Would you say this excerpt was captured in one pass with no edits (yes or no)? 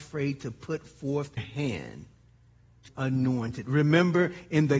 no